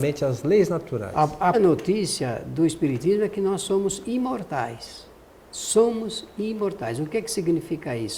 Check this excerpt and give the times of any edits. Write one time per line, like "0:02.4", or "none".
0:01.5